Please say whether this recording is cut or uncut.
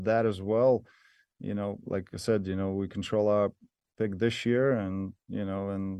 uncut